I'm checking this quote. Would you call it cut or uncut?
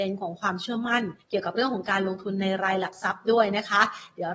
cut